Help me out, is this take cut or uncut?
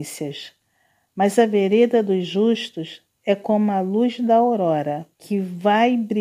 cut